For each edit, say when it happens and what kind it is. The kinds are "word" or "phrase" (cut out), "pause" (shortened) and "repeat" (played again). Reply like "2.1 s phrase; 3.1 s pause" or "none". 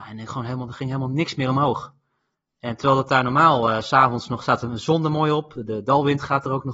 none